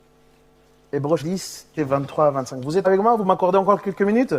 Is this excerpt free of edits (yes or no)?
no